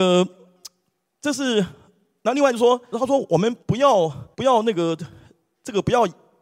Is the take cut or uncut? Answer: cut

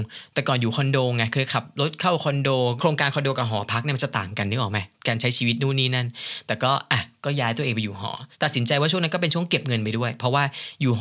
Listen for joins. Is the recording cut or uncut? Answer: cut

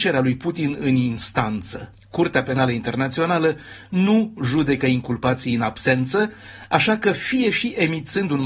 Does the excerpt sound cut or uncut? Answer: cut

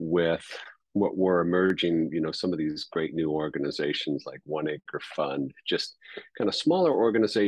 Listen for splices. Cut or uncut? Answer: uncut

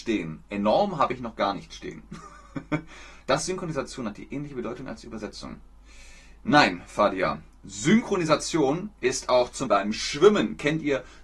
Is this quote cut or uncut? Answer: cut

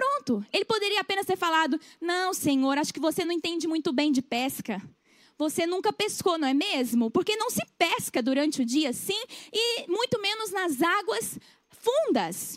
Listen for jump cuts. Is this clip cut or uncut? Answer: uncut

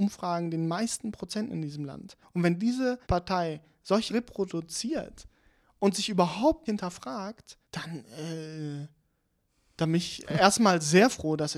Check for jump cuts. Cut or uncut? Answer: cut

